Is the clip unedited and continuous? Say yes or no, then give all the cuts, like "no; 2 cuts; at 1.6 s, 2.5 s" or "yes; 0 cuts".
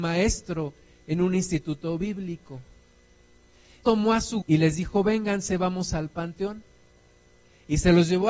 no; 2 cuts; at 3.8 s, 4.4 s